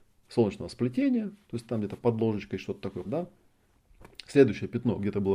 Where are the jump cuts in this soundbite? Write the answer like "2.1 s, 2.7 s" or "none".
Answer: 3.0 s